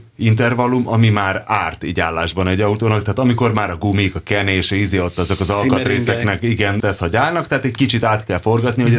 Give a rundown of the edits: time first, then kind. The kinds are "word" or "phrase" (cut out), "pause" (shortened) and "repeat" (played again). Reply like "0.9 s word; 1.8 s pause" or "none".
6.8 s word